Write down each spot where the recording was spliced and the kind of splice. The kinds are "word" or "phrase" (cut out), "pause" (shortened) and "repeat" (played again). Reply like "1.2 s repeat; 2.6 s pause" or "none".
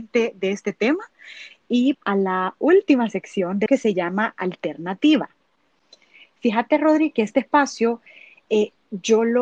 1.9 s word; 3.7 s word